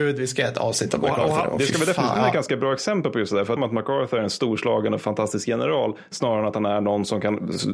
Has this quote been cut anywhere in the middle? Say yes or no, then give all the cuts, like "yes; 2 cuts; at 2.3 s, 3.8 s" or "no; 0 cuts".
yes; 2 cuts; at 2.2 s, 3.6 s